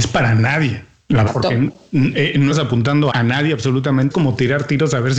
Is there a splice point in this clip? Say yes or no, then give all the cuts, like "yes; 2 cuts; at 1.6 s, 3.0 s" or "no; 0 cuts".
yes; 4 cuts; at 1.3 s, 2.5 s, 3.1 s, 4.1 s